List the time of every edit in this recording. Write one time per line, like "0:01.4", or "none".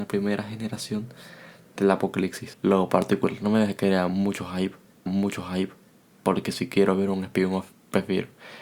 0:02.5
0:05.1